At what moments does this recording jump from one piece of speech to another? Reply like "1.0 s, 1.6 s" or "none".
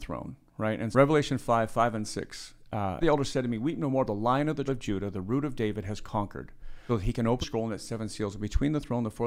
0.9 s, 3.0 s, 4.1 s, 4.7 s, 6.9 s, 7.4 s